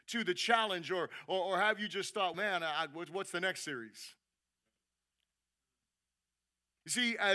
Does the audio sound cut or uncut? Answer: cut